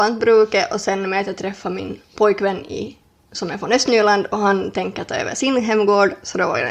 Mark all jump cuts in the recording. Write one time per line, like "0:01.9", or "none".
none